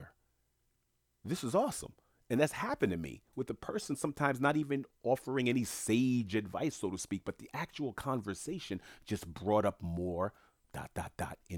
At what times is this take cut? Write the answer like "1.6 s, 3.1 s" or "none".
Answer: none